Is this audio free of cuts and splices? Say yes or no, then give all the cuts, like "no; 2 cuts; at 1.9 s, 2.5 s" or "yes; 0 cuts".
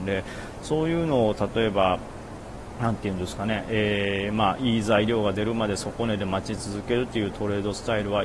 yes; 0 cuts